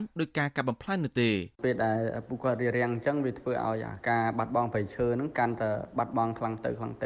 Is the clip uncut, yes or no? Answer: no